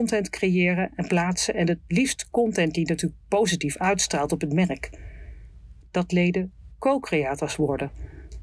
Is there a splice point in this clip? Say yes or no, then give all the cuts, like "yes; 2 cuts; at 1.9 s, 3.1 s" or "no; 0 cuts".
no; 0 cuts